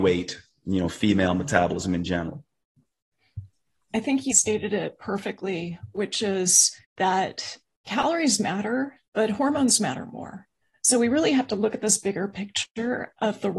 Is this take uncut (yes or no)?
no